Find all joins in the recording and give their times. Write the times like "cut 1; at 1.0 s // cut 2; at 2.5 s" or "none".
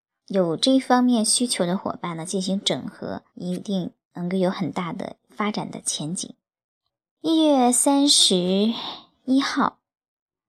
cut 1; at 3.3 s // cut 2; at 6.9 s